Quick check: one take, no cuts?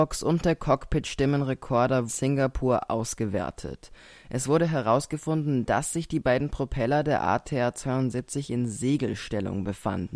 no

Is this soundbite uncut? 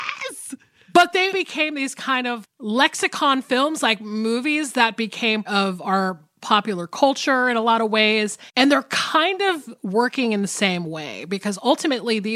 no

